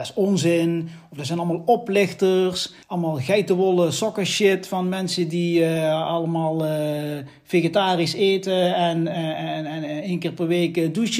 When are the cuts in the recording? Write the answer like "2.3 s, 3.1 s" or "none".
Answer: 2.8 s